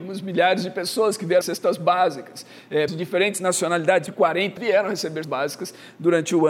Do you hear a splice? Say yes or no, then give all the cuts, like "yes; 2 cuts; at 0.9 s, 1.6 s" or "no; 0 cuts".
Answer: yes; 5 cuts; at 1.4 s, 2.9 s, 4.1 s, 4.6 s, 5.2 s